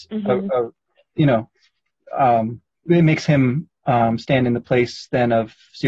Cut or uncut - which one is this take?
cut